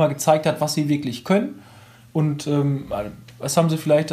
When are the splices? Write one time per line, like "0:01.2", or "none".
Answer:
none